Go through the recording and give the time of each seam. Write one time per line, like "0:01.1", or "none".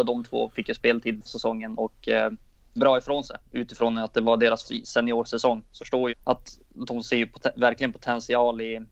0:01.3
0:02.8
0:03.4
0:04.6
0:05.8
0:06.1